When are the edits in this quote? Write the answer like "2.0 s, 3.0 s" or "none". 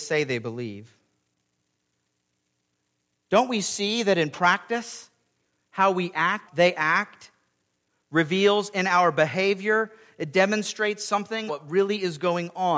6.5 s, 11.5 s